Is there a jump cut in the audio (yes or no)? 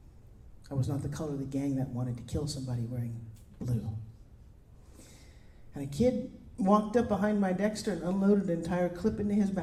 no